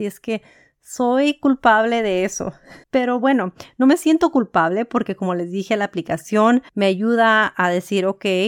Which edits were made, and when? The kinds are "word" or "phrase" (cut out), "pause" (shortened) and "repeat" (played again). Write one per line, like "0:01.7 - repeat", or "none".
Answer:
0:02.8 - pause
0:06.7 - pause